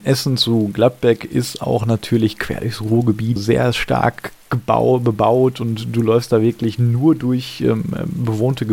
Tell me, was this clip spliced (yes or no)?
yes